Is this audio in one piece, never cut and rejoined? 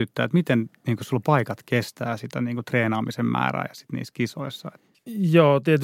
yes; 0 cuts

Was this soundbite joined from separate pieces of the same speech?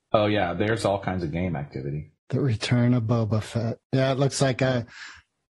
yes; 2 cuts; at 2.2 s, 3.8 s

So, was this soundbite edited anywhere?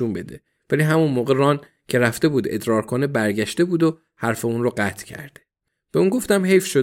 no; 0 cuts

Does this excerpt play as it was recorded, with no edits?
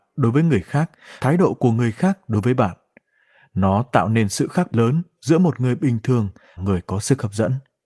no; 3 cuts; at 1.2 s, 4.7 s, 6.6 s

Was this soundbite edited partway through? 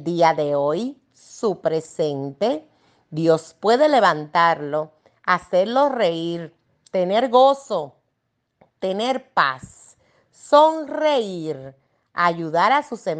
no; 0 cuts

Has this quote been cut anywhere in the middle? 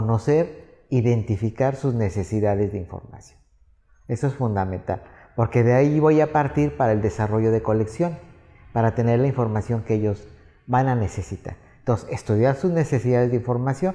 no; 0 cuts

